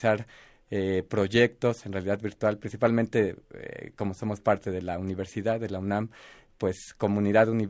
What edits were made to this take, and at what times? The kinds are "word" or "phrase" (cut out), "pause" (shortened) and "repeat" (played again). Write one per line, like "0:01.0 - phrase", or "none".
none